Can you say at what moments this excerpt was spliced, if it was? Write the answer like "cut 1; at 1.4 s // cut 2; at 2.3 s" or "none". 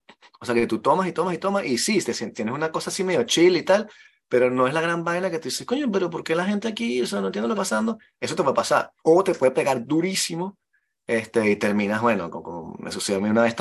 cut 1; at 7.5 s // cut 2; at 9.0 s